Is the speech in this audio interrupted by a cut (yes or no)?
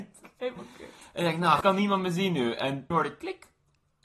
yes